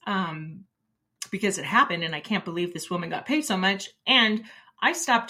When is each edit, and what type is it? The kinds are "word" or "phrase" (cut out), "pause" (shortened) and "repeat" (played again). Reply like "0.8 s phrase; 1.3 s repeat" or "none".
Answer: none